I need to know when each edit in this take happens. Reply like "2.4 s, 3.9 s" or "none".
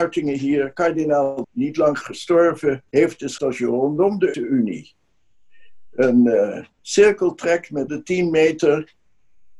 1.4 s, 2.0 s, 2.9 s, 3.4 s, 4.3 s, 6.7 s, 7.9 s